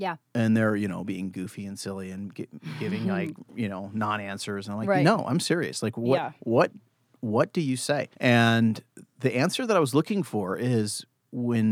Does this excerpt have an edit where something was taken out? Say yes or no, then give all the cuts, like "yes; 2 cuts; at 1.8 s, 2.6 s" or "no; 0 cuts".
yes; 1 cut; at 8.1 s